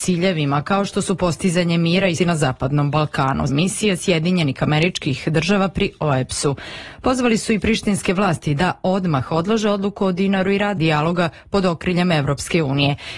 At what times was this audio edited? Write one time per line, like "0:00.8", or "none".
0:02.2
0:03.5
0:10.8

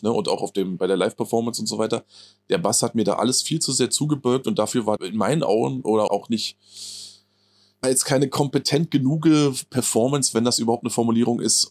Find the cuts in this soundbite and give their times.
0:05.0
0:06.1
0:07.8

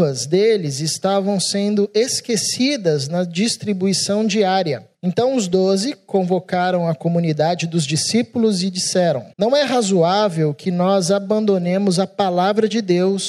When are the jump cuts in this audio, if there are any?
0:04.9
0:09.3

